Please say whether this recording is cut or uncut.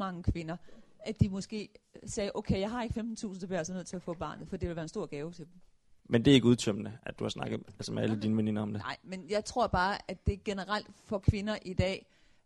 cut